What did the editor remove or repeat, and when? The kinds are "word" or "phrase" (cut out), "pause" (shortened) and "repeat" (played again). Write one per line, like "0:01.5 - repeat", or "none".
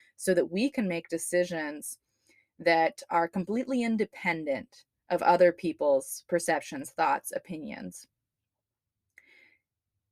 none